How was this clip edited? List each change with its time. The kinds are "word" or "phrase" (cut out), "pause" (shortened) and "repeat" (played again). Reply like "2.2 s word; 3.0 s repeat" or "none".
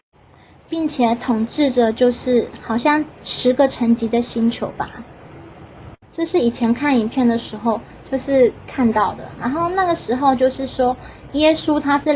6.0 s pause